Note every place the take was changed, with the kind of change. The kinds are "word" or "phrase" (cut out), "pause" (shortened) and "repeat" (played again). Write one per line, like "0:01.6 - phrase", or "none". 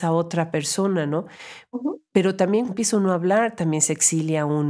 0:02.7 - word